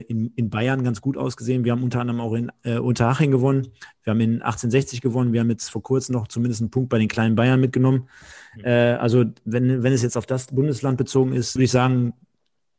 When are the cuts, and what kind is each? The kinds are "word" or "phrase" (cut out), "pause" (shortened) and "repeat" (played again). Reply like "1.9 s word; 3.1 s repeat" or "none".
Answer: 11.6 s phrase